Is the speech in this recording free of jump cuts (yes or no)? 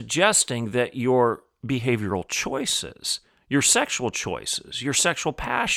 yes